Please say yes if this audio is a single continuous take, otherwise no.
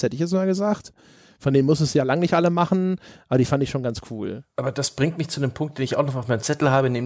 yes